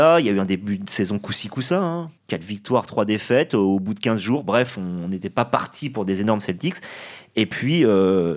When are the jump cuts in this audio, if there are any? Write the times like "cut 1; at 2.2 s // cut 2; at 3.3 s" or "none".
cut 1; at 2.2 s